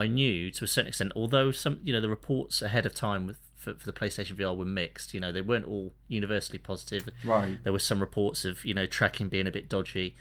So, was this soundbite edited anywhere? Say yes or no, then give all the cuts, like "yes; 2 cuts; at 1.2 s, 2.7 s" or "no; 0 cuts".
no; 0 cuts